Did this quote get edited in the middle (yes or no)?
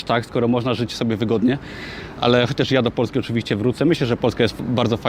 no